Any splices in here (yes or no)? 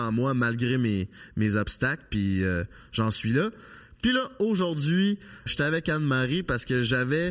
yes